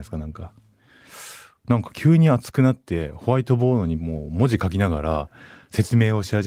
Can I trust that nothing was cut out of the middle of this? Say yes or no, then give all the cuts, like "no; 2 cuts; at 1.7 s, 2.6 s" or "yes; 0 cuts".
yes; 0 cuts